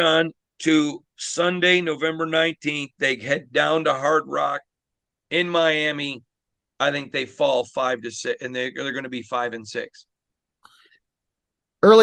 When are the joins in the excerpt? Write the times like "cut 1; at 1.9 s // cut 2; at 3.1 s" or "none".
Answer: none